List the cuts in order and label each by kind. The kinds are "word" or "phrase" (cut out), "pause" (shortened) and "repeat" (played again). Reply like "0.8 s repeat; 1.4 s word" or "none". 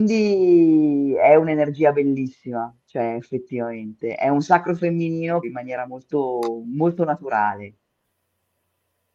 5.4 s phrase